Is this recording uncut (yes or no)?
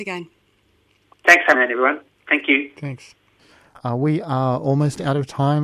no